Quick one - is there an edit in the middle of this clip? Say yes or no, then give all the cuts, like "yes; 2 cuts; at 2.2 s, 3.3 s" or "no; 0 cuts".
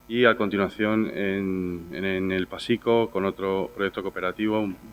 no; 0 cuts